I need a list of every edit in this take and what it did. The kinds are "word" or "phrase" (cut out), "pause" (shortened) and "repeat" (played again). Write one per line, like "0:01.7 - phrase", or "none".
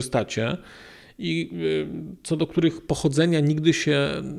none